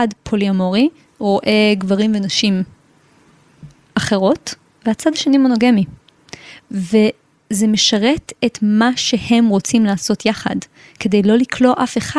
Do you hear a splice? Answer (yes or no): no